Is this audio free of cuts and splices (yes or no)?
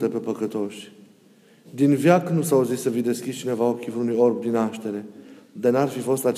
yes